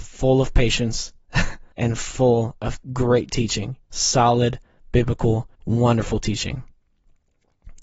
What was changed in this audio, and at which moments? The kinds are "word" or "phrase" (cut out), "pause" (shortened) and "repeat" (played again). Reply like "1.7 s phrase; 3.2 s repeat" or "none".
1.7 s pause; 2.8 s pause; 3.8 s pause; 5.5 s pause